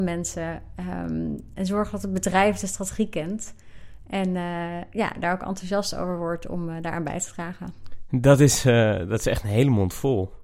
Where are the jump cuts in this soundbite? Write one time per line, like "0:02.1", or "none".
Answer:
none